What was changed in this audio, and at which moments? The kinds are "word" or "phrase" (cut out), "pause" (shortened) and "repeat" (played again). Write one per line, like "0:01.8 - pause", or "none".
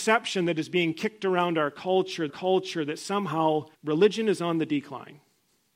0:02.3 - repeat
0:03.7 - pause